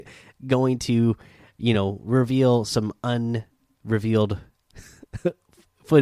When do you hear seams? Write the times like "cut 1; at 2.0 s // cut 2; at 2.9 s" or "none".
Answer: none